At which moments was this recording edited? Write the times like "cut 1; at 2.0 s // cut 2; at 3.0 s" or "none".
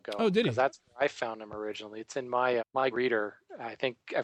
cut 1; at 2.6 s // cut 2; at 2.9 s